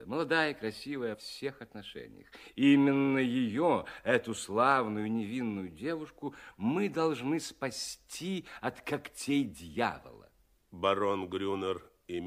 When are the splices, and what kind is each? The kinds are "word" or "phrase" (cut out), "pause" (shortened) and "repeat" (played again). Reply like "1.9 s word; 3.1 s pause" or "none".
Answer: 1.1 s phrase